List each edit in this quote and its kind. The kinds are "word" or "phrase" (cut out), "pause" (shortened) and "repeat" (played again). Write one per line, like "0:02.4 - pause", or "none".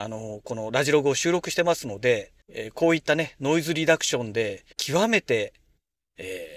0:02.4 - pause
0:04.7 - pause